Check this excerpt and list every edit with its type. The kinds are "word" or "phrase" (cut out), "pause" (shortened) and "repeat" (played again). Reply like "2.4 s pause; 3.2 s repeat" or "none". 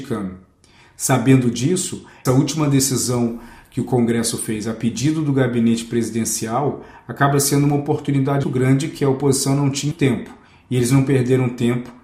2.3 s word; 8.4 s word; 9.9 s word